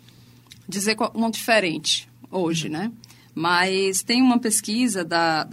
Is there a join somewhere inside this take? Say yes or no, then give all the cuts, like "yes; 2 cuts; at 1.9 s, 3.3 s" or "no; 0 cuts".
yes; 1 cut; at 1.3 s